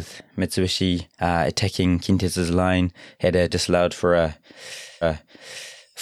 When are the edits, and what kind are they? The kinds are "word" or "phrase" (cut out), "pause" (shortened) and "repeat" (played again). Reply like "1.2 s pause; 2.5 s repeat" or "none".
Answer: 1.1 s pause; 3.5 s word; 5.0 s repeat